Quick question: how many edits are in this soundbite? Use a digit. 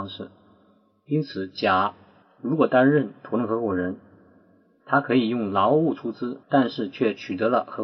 1